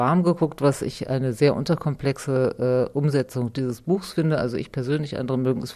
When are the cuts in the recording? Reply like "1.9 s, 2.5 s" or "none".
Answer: none